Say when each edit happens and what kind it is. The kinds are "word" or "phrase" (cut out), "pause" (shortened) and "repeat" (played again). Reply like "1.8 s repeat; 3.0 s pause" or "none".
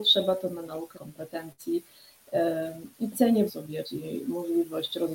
0.9 s word; 3.5 s word; 3.8 s word